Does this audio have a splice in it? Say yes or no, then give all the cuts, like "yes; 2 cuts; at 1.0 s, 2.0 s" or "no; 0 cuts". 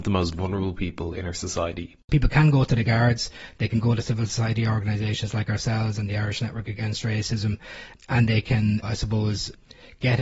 yes; 1 cut; at 8.8 s